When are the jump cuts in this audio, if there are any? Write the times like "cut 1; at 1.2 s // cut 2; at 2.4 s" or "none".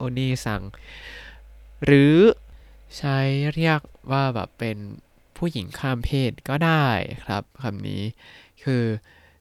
none

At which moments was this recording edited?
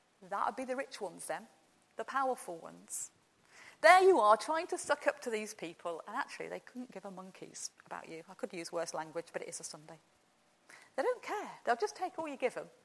none

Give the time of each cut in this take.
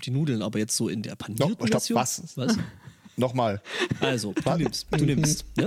cut 1; at 1.0 s

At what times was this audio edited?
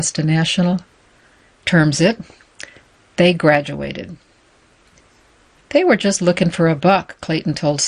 none

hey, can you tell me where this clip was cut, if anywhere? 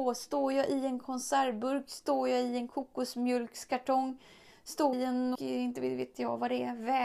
cut 1; at 4.9 s // cut 2; at 5.3 s

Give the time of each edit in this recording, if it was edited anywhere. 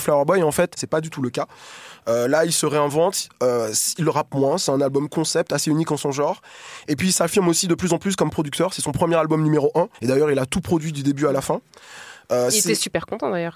cut 1; at 9.9 s

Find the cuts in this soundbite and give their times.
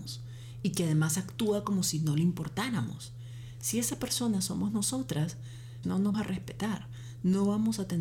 cut 1; at 5.8 s // cut 2; at 6.1 s

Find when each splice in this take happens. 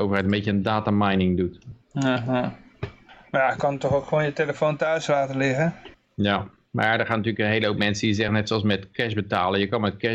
none

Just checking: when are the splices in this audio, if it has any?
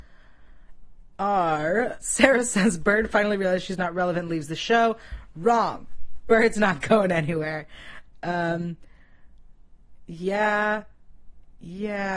cut 1; at 2.0 s

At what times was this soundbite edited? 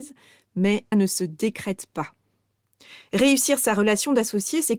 cut 1; at 0.9 s

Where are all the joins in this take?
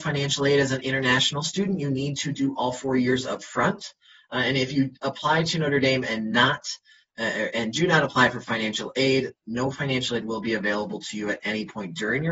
none

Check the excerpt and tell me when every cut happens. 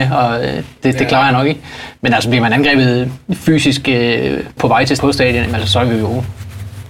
cut 1; at 4.6 s // cut 2; at 5.0 s

